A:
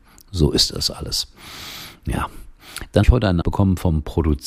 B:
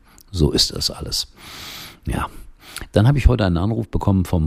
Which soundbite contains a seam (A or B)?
A